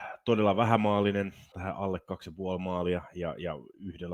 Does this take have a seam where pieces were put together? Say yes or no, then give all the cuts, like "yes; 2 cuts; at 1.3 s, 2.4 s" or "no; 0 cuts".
yes; 1 cut; at 1.5 s